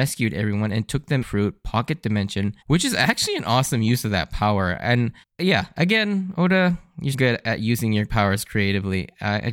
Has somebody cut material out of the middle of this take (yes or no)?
yes